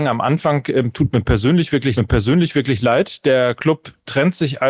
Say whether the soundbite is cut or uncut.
cut